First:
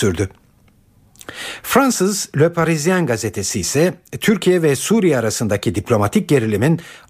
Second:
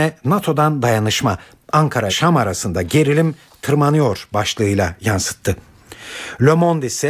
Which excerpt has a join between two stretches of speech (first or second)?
second